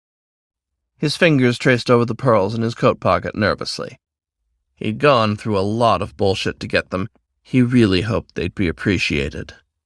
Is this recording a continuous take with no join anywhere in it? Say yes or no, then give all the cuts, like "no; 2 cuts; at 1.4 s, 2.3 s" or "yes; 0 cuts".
yes; 0 cuts